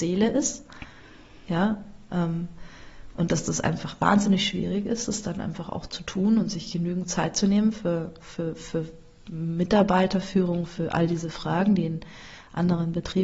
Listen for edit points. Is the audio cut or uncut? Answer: uncut